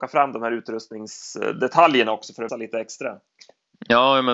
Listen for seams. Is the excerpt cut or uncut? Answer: cut